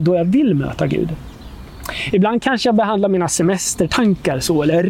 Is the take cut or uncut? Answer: uncut